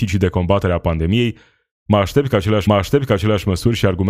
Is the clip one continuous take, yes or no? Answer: no